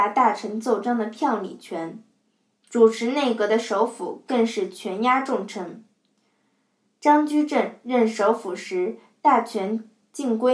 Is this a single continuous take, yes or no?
yes